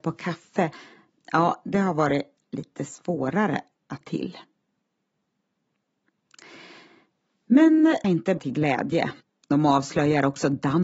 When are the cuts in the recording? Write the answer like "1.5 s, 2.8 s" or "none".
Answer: 4.0 s, 8.0 s, 8.4 s, 9.2 s

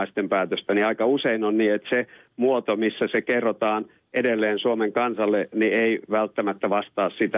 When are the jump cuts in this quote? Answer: none

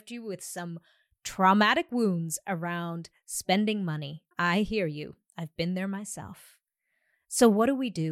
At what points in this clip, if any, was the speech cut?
4.3 s

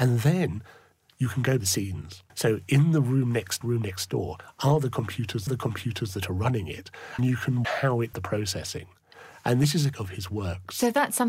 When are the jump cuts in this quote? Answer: 1.6 s, 2.3 s, 3.6 s, 5.5 s, 7.2 s, 7.6 s, 8.1 s, 9.9 s

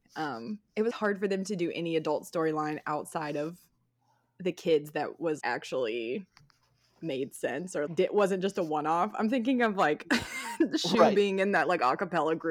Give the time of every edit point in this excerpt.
0.9 s, 5.4 s, 7.9 s

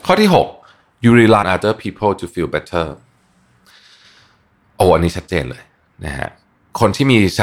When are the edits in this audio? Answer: 1.4 s

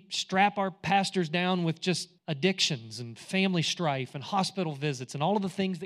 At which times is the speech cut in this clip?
2.2 s

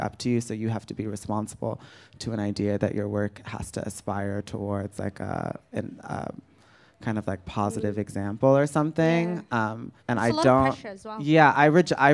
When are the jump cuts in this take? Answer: 10.0 s

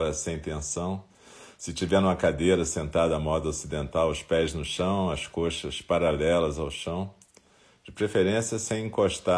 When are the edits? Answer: none

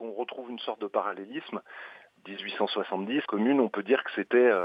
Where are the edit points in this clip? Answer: 3.3 s

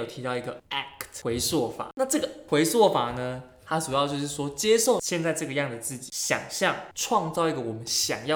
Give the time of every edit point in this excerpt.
2.5 s

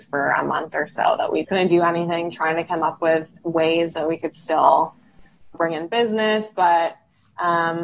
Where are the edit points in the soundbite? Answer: 1.4 s, 5.5 s

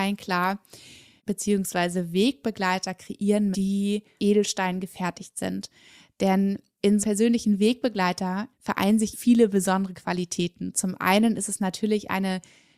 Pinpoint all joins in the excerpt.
1.2 s, 3.5 s, 4.2 s, 7.0 s, 8.5 s, 9.1 s

